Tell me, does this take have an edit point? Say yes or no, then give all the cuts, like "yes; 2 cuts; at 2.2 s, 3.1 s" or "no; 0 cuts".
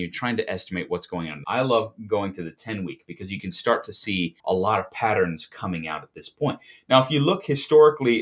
yes; 2 cuts; at 1.4 s, 4.4 s